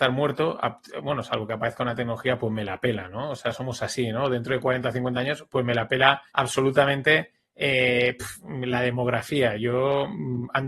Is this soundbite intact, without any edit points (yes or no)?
no